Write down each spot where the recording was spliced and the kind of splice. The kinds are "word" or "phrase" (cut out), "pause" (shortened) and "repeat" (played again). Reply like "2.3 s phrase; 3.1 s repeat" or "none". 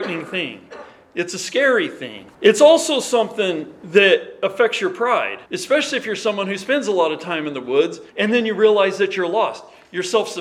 2.3 s pause; 5.5 s pause; 8.1 s pause